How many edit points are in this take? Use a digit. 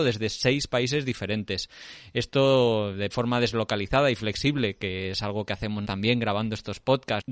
2